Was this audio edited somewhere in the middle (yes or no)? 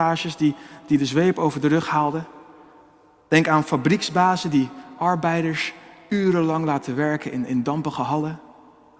no